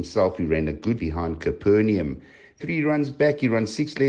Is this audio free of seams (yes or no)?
no